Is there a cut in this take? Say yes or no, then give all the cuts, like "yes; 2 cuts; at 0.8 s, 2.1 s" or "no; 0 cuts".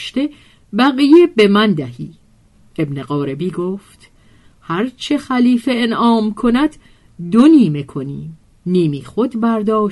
no; 0 cuts